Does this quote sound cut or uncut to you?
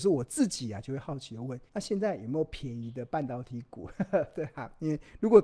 cut